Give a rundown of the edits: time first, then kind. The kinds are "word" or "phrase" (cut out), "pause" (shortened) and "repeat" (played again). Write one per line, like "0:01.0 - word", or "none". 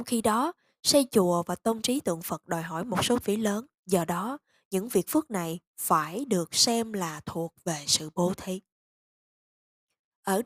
0:03.2 - phrase
0:03.8 - pause